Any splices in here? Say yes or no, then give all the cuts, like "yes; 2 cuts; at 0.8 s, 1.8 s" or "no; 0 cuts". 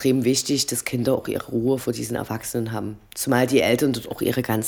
no; 0 cuts